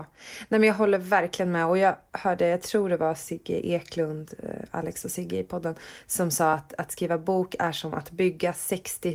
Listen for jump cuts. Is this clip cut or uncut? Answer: uncut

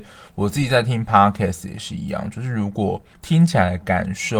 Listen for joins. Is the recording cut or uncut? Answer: uncut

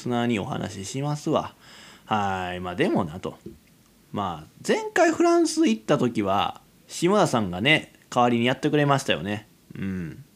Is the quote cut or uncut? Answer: cut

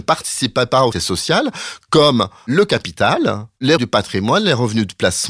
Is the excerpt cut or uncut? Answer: cut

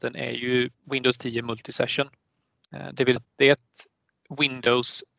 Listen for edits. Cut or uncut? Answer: cut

